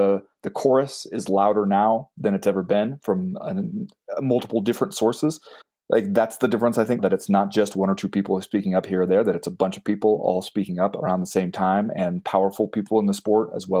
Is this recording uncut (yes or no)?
no